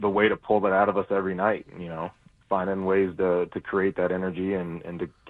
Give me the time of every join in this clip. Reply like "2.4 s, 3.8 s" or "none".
none